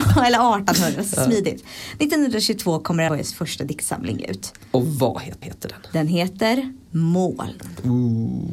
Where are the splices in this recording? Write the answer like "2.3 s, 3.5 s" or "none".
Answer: 3.1 s, 5.4 s, 6.8 s